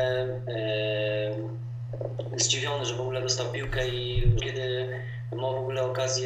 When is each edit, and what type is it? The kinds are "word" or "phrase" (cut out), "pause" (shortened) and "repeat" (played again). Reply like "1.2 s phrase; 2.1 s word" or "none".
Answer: 4.4 s word